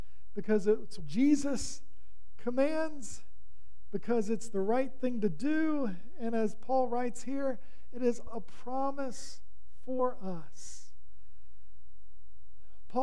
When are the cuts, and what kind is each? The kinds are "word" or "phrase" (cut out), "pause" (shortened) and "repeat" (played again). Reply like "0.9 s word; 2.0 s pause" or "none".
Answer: 1.0 s word; 8.3 s word